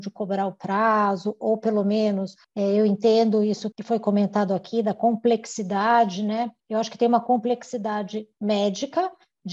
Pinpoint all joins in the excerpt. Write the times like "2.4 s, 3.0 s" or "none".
2.4 s, 3.7 s, 6.6 s